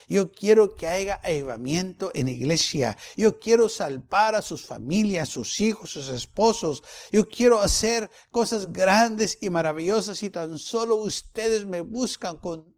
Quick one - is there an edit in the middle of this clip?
no; 0 cuts

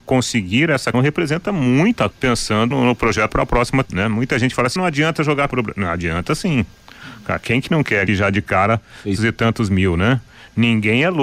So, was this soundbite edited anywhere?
yes; 9 cuts; at 0.9 s, 2.1 s, 2.7 s, 3.3 s, 3.9 s, 4.8 s, 5.5 s, 8.1 s, 9.2 s

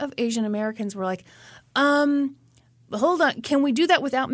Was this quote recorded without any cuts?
yes; 0 cuts

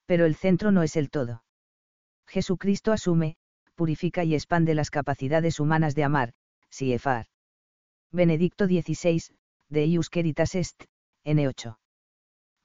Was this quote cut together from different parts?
no; 0 cuts

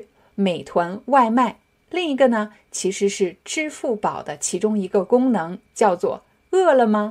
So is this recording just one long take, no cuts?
yes; 0 cuts

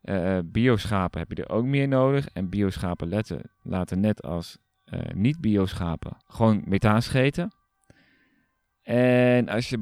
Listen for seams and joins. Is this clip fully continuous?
yes; 0 cuts

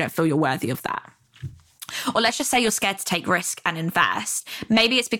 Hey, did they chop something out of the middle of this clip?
no; 0 cuts

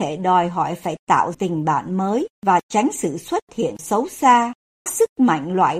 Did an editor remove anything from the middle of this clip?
yes; 4 cuts; at 1.3 s, 2.3 s, 3.8 s, 4.9 s

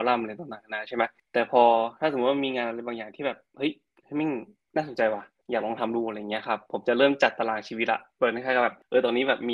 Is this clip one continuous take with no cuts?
yes; 0 cuts

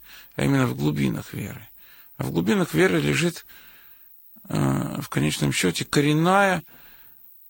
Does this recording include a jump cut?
no; 0 cuts

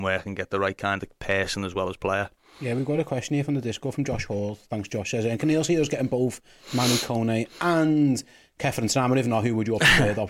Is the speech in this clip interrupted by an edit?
no; 0 cuts

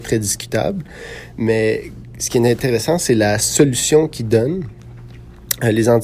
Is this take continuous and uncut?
yes; 0 cuts

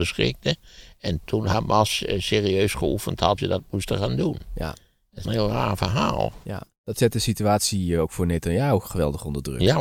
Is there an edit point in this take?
yes; 3 cuts; at 1.2 s, 3.4 s, 5.2 s

